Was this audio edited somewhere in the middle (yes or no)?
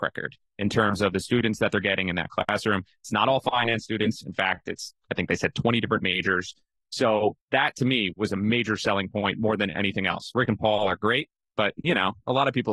no